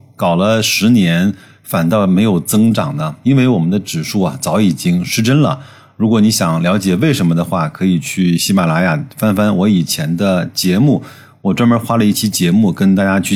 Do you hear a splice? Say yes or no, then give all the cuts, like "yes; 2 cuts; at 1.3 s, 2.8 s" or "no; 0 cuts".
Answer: no; 0 cuts